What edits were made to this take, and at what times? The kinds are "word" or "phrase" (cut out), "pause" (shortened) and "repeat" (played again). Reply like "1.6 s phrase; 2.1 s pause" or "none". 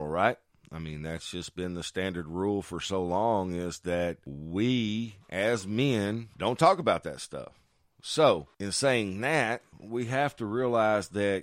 9.7 s pause